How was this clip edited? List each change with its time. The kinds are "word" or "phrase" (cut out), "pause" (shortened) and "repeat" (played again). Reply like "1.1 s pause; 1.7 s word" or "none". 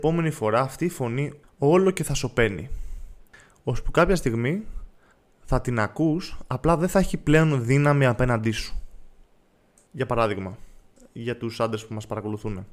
none